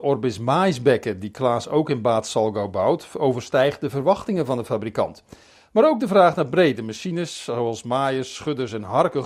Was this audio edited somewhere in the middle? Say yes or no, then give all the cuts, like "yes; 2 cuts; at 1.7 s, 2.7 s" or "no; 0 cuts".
no; 0 cuts